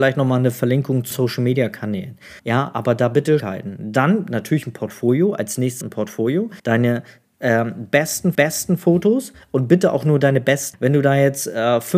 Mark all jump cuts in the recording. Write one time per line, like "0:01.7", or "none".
0:01.1
0:02.4
0:03.4
0:05.8
0:06.6
0:08.3
0:10.7